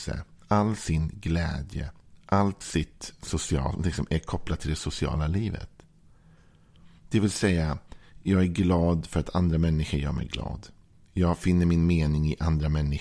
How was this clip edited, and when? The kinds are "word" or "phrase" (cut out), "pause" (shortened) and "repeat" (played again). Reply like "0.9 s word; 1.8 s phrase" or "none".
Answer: none